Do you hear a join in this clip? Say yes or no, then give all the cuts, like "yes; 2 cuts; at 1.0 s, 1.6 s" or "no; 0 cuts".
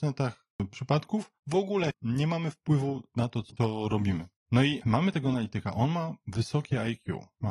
yes; 2 cuts; at 1.4 s, 4.4 s